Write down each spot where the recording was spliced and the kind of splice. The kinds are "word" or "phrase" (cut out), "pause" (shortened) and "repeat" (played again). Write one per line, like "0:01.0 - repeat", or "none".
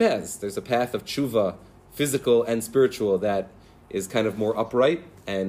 none

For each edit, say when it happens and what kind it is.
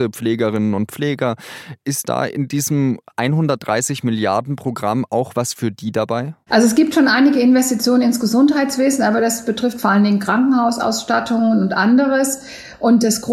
0:06.4 - pause

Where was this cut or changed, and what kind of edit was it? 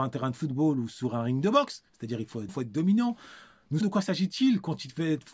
0:02.5 - word
0:03.8 - word

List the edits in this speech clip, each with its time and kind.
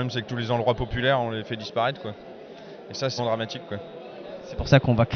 0:03.2 - word

